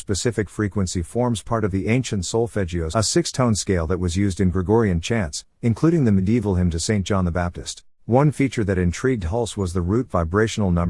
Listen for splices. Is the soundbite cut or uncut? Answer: cut